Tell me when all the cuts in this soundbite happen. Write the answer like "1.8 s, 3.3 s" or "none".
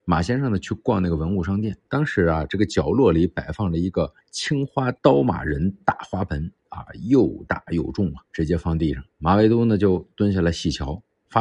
1.8 s, 4.2 s, 5.0 s, 6.6 s, 8.3 s, 9.1 s

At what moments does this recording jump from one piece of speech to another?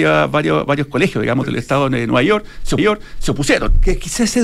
2.8 s

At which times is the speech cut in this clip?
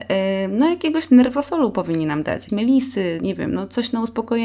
2.5 s

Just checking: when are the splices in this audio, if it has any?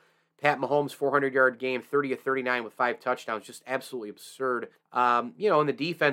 4.7 s

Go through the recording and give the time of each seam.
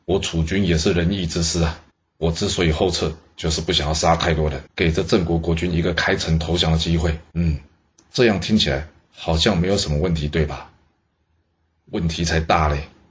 1.9 s, 4.7 s, 7.3 s

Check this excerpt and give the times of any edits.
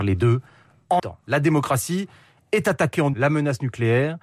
1.0 s, 3.1 s

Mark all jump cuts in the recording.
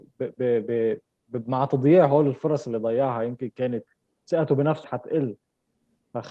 4.8 s

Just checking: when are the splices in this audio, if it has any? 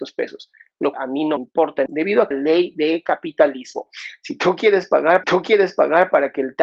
0.9 s, 1.4 s, 1.9 s, 2.3 s, 5.2 s

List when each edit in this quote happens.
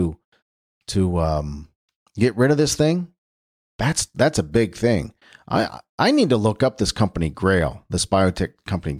none

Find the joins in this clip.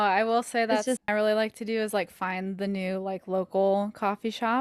1.0 s

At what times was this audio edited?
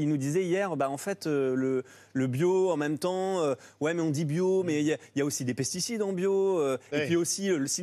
none

